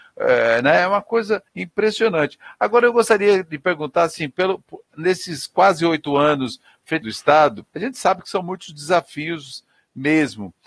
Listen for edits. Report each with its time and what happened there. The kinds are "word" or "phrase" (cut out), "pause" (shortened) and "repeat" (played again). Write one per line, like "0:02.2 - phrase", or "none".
0:01.5 - pause
0:07.0 - phrase
0:07.7 - pause